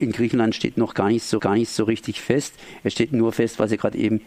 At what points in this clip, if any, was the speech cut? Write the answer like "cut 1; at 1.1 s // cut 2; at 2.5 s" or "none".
cut 1; at 1.4 s